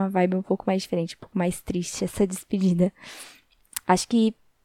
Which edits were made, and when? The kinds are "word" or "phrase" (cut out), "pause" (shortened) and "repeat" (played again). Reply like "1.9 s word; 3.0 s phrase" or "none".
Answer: none